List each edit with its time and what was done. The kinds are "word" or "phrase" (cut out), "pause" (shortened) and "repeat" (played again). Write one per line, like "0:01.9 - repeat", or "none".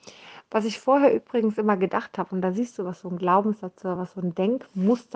none